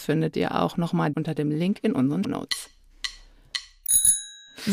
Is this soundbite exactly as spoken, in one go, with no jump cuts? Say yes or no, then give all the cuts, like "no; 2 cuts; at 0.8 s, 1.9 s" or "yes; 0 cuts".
no; 2 cuts; at 1.1 s, 2.2 s